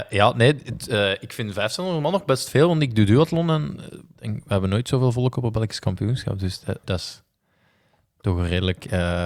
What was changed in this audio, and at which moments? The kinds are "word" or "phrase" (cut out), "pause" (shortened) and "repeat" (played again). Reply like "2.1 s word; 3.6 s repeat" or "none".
4.1 s word; 6.8 s word